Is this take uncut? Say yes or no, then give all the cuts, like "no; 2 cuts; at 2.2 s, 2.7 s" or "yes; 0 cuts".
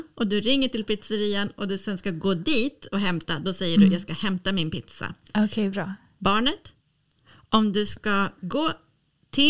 yes; 0 cuts